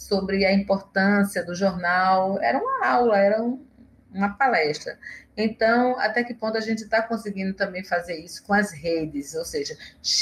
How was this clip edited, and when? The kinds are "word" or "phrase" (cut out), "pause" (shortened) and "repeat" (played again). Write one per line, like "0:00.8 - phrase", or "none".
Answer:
none

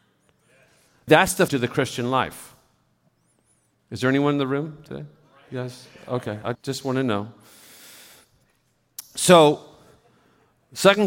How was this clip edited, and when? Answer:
0:01.1 - word
0:01.5 - word
0:06.5 - word

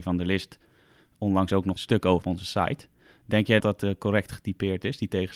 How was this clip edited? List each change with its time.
0:01.8 - word
0:02.2 - word
0:03.6 - word

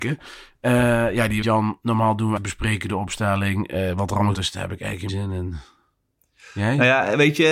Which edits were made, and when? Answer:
0:01.4 - word
0:02.4 - word
0:04.3 - word
0:05.1 - word

